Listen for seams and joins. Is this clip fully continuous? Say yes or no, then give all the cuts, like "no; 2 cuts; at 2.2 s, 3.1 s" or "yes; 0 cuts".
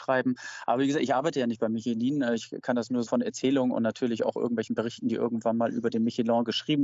no; 1 cut; at 3.1 s